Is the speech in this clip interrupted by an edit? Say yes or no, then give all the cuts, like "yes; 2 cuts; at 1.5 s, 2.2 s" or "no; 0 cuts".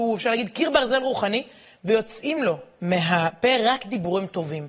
no; 0 cuts